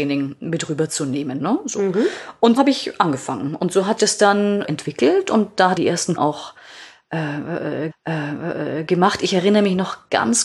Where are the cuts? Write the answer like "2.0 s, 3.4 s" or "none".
2.6 s, 4.0 s, 4.6 s, 5.8 s, 6.2 s, 7.9 s